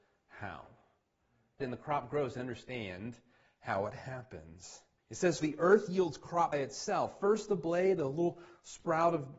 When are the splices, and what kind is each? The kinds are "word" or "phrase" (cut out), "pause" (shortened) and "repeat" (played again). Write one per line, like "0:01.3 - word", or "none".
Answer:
0:01.6 - phrase
0:02.4 - phrase
0:05.0 - pause
0:05.4 - word
0:06.5 - word